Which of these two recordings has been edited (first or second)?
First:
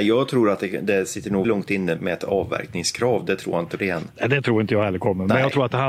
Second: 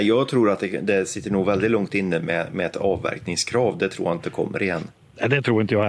first